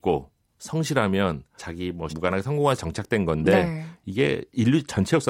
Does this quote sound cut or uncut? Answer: cut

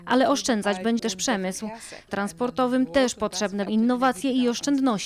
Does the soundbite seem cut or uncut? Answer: cut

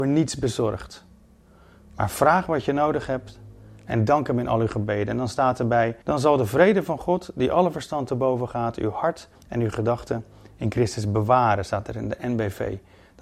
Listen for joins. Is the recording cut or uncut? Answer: cut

